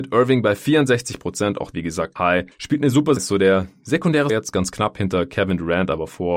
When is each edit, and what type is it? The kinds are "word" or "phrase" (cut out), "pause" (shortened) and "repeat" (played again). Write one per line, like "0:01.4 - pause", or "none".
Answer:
0:01.7 - word
0:02.2 - word
0:03.2 - word
0:04.3 - word